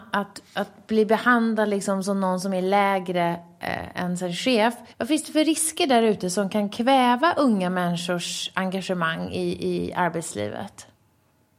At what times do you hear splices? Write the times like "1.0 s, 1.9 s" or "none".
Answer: 4.9 s